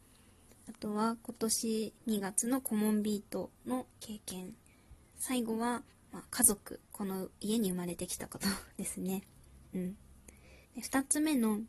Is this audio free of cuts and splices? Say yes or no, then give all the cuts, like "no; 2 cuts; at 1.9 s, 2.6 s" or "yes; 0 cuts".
no; 5 cuts; at 2.0 s, 3.9 s, 5.9 s, 6.8 s, 10.6 s